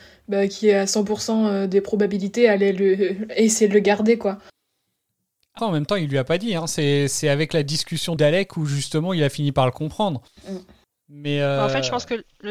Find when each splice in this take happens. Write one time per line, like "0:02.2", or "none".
0:05.6
0:08.2
0:10.3